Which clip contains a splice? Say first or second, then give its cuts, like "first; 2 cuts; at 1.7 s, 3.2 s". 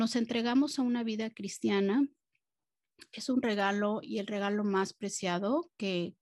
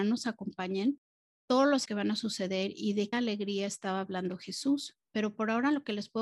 second; 2 cuts; at 1.9 s, 3.1 s